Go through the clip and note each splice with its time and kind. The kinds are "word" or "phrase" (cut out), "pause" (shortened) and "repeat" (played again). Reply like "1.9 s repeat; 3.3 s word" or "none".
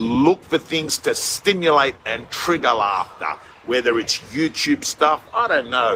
none